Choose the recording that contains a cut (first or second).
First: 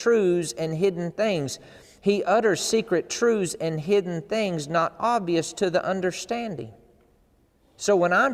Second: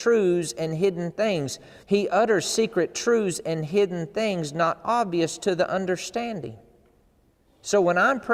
second